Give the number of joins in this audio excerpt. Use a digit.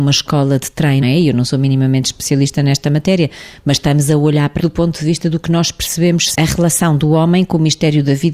3